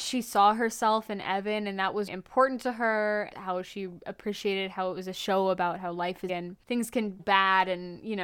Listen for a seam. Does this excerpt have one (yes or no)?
yes